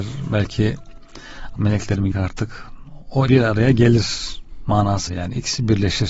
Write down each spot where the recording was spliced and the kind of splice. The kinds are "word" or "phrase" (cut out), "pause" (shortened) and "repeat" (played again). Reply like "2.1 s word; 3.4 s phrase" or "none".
1.6 s word; 2.1 s word; 3.3 s word; 5.1 s word